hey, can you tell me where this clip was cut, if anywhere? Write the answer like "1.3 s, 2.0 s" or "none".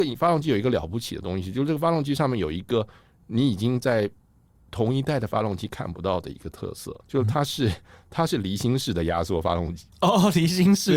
7.0 s, 9.9 s